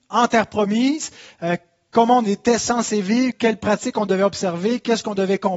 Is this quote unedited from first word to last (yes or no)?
yes